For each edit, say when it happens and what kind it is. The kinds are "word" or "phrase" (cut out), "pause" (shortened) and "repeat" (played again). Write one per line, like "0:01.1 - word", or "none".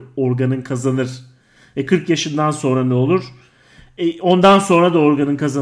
none